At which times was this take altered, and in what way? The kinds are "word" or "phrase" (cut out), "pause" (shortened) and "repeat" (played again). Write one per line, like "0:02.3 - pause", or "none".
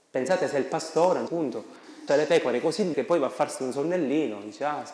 0:01.3 - word
0:02.1 - word
0:02.9 - word